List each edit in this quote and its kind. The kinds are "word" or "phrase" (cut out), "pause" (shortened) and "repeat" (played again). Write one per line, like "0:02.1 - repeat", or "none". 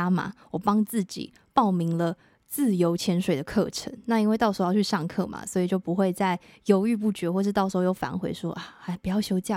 none